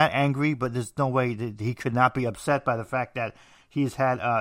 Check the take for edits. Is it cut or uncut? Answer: uncut